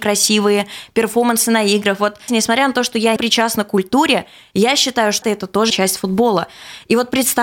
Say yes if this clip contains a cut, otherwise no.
yes